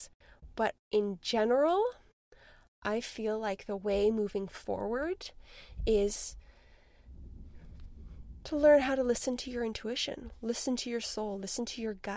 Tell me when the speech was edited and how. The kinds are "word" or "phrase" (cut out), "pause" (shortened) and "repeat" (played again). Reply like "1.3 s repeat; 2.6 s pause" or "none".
none

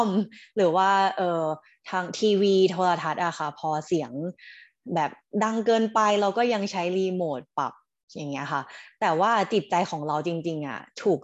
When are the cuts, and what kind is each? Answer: none

